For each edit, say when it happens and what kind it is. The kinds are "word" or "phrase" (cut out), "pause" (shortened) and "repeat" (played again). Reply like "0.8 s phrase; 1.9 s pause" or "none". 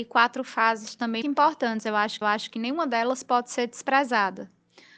1.2 s word; 2.2 s repeat